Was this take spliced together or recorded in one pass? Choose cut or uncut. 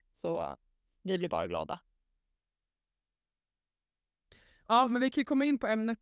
uncut